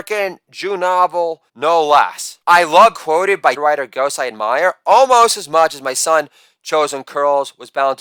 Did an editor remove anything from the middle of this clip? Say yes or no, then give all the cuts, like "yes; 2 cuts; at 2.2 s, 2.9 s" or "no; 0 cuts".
yes; 4 cuts; at 1.5 s, 2.4 s, 2.9 s, 3.6 s